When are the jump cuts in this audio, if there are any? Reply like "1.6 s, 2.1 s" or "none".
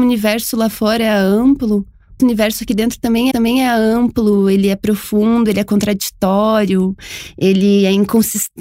2.2 s, 3.3 s